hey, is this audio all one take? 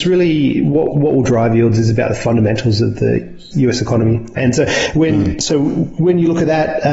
no; 2 cuts; at 3.5 s, 4.4 s

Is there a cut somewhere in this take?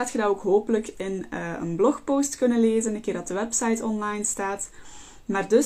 no; 0 cuts

